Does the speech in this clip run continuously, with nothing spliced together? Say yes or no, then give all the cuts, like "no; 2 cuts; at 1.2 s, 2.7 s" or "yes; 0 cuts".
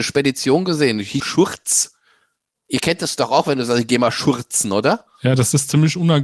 no; 1 cut; at 1.2 s